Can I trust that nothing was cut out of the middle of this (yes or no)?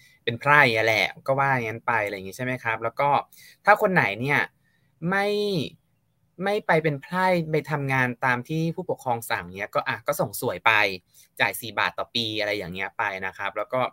yes